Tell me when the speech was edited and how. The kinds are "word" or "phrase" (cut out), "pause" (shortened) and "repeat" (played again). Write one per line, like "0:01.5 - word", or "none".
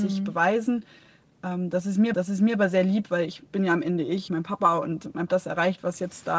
0:02.1 - repeat
0:03.5 - pause
0:04.3 - phrase
0:05.3 - phrase